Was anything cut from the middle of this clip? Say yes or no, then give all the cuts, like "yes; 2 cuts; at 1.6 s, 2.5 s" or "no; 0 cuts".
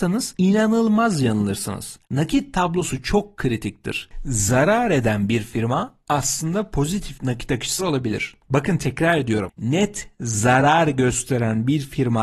yes; 2 cuts; at 2.0 s, 7.8 s